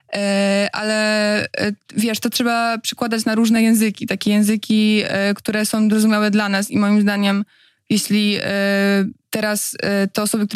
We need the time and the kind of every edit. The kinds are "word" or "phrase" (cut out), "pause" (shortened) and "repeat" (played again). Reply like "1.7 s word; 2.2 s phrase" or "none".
none